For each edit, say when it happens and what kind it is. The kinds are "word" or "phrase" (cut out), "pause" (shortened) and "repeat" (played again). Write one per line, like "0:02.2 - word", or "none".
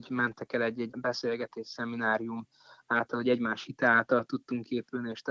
0:00.9 - word